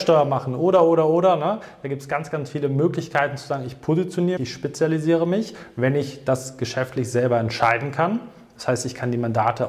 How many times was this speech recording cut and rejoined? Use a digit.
1